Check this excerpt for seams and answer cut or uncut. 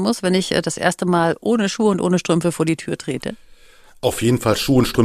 uncut